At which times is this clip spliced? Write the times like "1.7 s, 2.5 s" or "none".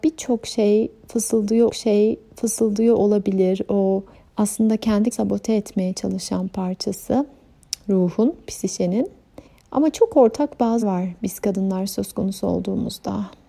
1.7 s, 4.1 s, 5.1 s, 9.5 s, 10.8 s